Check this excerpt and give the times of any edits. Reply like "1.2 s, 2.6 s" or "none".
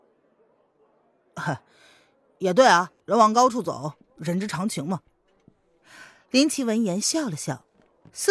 3.0 s

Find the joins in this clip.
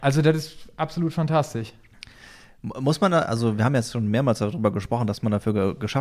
none

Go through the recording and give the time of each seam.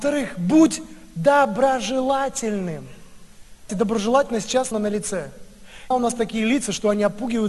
3.7 s, 4.7 s, 5.9 s

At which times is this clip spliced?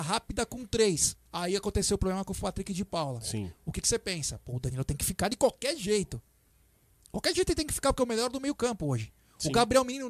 1.3 s

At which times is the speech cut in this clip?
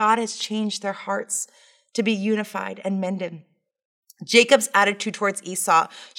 none

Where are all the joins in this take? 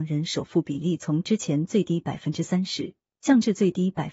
none

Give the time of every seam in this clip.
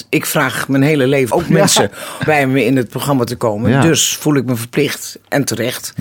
1.3 s, 2.3 s

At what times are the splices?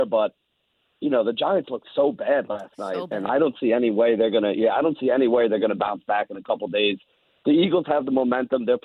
none

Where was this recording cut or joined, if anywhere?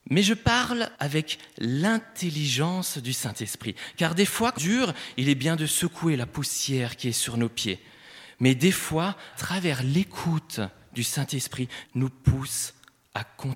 0.9 s, 4.6 s, 9.3 s, 11.8 s

